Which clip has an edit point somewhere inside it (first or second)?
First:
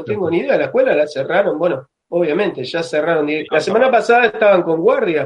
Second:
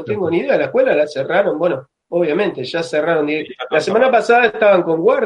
first